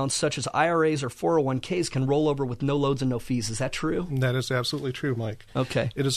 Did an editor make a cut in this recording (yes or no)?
no